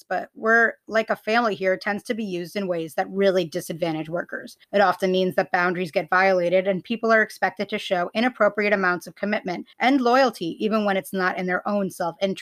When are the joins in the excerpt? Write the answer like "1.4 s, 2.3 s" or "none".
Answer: 4.6 s, 9.7 s